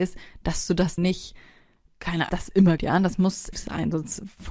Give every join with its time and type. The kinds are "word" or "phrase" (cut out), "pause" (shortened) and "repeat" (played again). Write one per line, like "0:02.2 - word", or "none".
0:01.0 - word
0:01.9 - word
0:02.3 - word
0:02.8 - word
0:03.5 - word